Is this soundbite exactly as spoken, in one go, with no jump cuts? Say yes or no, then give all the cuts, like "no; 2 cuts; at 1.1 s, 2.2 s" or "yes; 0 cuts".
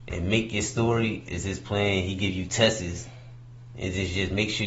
yes; 0 cuts